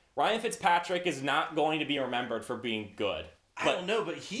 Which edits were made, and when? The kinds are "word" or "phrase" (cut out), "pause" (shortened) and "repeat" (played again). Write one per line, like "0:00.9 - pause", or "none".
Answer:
none